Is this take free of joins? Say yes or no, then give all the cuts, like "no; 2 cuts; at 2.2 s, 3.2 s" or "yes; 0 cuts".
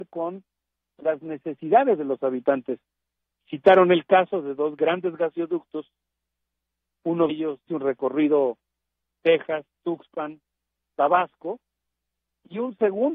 no; 3 cuts; at 7.3 s, 7.7 s, 9.7 s